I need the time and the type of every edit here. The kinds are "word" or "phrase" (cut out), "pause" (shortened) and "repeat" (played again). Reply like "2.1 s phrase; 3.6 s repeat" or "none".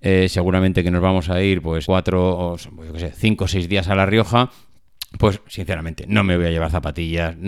1.8 s word; 5.4 s word

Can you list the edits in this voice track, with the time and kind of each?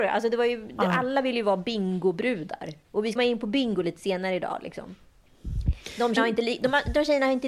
3.2 s phrase; 6.2 s word

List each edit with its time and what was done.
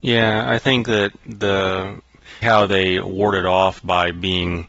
2.4 s word

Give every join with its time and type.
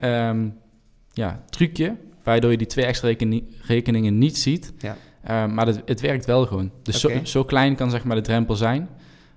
none

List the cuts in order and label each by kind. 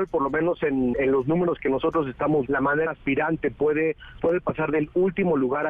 0.9 s word; 2.5 s word; 2.9 s phrase; 4.2 s phrase

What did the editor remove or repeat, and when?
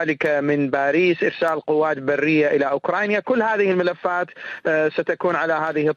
none

